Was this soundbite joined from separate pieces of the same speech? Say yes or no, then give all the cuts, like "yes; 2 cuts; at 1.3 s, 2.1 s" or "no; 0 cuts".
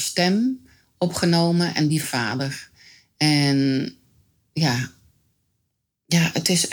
yes; 1 cut; at 2.0 s